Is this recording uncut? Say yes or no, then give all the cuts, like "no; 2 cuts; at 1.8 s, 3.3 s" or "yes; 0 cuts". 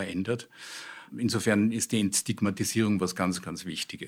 yes; 0 cuts